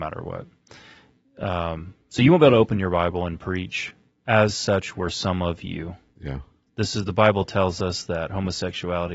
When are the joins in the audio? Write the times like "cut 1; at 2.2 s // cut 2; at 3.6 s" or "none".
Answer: none